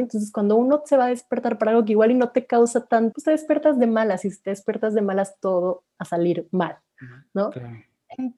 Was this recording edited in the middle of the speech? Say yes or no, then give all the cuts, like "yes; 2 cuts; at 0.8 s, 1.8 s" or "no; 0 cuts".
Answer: yes; 2 cuts; at 3.1 s, 6.0 s